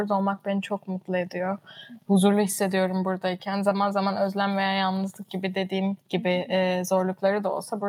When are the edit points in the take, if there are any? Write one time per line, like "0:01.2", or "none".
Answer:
0:06.0